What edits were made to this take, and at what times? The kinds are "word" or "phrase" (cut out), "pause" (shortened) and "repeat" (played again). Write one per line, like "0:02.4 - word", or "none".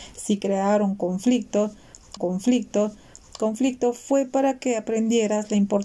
0:02.2 - repeat